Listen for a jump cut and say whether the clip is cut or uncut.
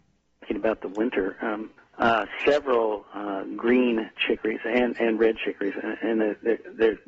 uncut